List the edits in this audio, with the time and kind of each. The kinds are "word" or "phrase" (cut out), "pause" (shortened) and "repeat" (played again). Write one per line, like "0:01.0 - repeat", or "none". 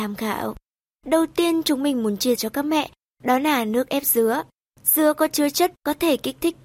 0:02.4 - word
0:05.8 - word